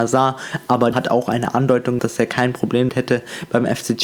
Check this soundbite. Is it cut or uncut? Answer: cut